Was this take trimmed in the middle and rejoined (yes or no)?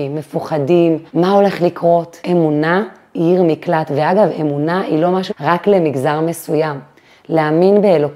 yes